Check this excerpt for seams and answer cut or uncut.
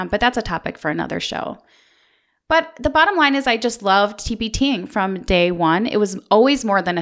uncut